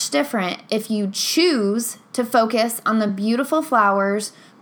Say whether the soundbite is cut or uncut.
uncut